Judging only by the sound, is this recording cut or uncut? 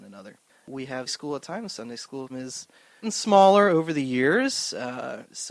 cut